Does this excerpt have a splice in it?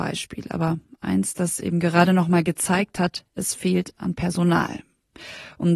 no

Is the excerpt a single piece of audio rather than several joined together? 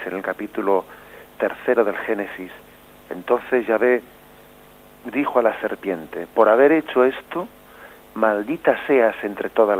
yes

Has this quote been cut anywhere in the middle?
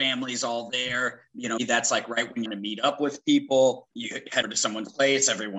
yes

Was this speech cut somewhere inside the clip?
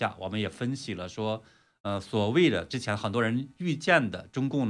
no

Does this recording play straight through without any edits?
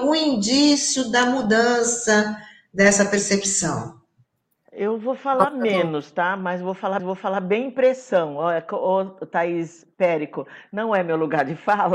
no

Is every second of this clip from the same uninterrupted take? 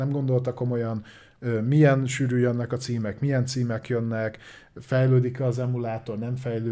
yes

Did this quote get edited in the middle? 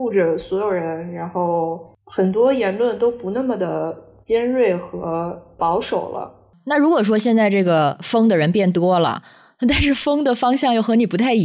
no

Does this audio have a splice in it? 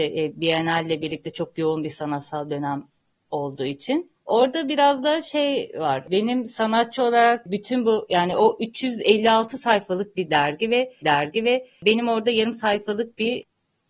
yes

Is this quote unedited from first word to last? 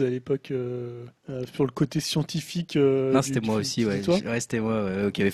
no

